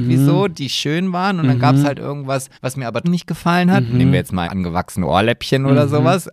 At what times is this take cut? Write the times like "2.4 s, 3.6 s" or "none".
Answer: 2.5 s, 3.0 s, 4.4 s